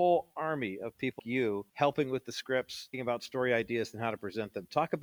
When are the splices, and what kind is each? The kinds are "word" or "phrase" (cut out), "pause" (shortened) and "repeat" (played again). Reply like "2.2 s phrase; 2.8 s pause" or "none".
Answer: 1.2 s word; 1.7 s pause; 2.9 s word